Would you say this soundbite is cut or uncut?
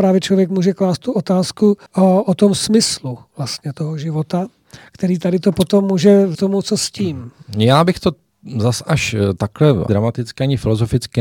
cut